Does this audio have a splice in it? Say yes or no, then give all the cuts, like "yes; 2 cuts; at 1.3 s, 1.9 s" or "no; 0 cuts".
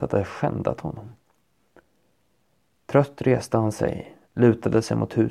no; 0 cuts